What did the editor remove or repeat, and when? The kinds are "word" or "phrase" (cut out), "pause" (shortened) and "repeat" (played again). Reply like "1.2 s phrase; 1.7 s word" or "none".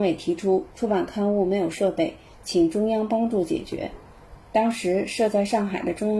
4.4 s pause